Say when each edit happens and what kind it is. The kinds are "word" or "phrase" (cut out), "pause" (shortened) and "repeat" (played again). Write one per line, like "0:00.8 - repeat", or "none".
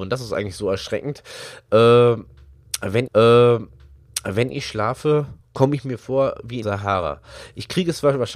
0:03.1 - repeat
0:06.6 - word